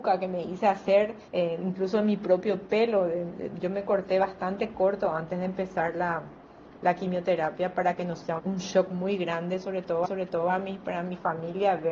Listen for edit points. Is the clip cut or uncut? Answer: cut